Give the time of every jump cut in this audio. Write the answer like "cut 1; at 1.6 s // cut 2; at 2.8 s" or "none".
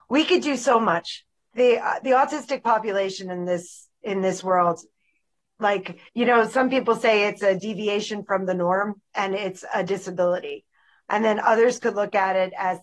cut 1; at 6.1 s